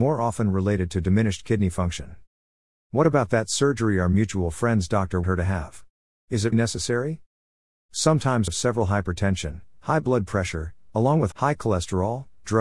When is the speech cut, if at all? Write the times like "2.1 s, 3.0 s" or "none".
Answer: 5.2 s, 6.5 s, 8.5 s, 10.9 s, 11.3 s